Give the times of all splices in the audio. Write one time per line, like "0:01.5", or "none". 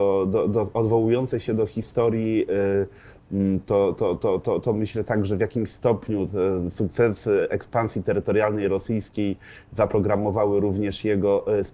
none

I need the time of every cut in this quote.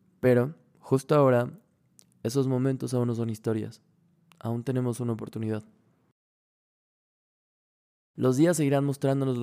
none

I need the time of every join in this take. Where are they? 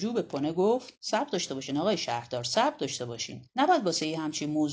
0:01.0
0:03.5

